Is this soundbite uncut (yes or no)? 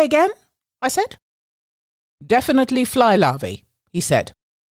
yes